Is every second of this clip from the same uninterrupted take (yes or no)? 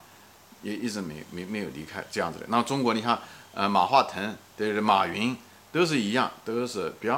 yes